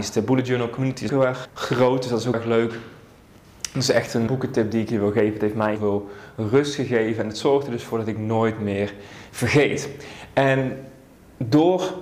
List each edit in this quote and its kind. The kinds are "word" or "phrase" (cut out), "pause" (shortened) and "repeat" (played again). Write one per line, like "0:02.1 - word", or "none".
0:01.1 - word
0:01.4 - word
0:02.3 - word
0:04.3 - word
0:05.8 - word
0:09.3 - word